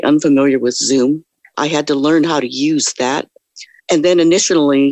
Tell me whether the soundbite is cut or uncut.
cut